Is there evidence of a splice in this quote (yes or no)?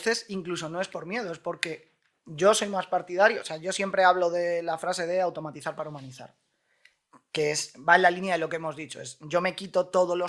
no